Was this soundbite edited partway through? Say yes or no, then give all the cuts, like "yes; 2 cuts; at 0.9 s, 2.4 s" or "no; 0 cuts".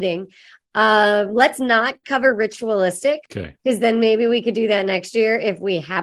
yes; 1 cut; at 3.3 s